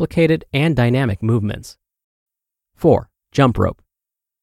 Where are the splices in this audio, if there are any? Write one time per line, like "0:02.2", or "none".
0:03.2